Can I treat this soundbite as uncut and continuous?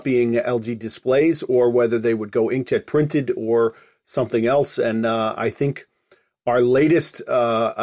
yes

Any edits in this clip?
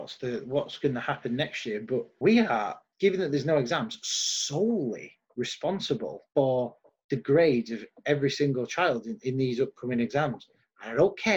no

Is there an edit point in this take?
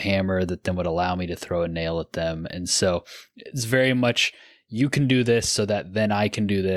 no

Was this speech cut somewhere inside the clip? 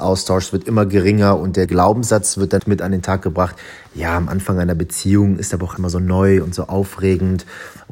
yes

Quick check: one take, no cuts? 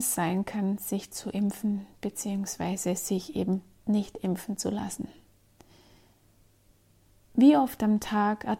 yes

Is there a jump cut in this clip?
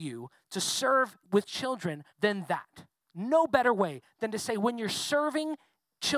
yes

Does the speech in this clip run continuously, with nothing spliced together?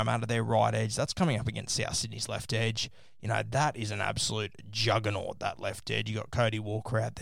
yes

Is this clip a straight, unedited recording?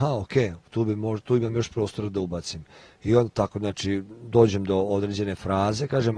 yes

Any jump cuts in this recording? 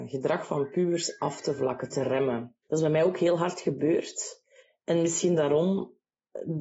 yes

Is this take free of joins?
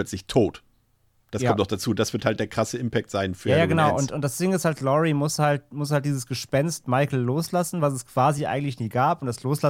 yes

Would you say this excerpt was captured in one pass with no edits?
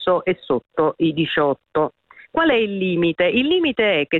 yes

